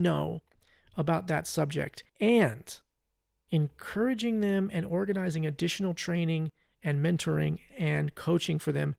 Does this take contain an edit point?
yes; 1 cut; at 2.1 s

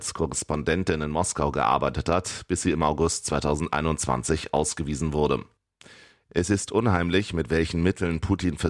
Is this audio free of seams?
yes; 0 cuts

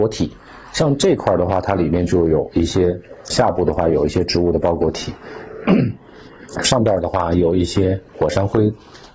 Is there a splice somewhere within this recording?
yes; 1 cut; at 3.3 s

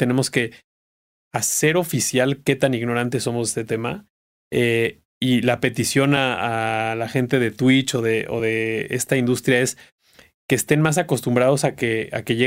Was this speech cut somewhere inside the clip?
no; 0 cuts

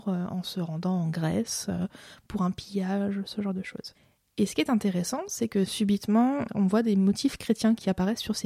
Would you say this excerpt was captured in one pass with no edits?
no; 1 cut; at 6.5 s

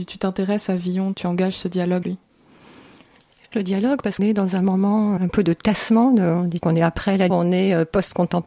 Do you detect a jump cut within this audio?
yes; 7 cuts; at 1.1 s, 2.0 s, 3.5 s, 4.2 s, 5.2 s, 6.6 s, 7.3 s

